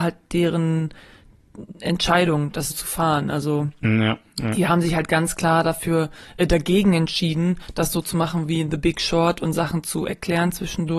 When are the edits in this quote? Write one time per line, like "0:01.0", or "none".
0:02.7